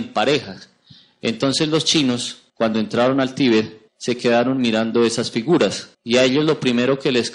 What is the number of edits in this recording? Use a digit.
3